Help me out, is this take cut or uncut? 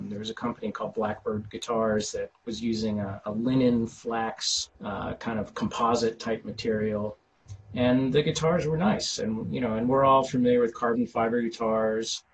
cut